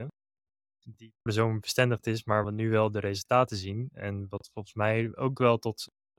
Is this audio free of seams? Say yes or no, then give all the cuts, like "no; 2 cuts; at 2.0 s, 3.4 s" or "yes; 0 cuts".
no; 2 cuts; at 1.3 s, 2.4 s